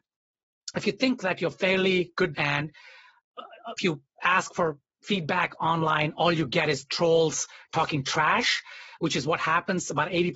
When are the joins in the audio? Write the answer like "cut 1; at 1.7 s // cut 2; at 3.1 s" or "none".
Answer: cut 1; at 2.3 s // cut 2; at 3.8 s